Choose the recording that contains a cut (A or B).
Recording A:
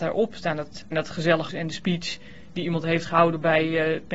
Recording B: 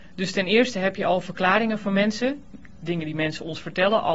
A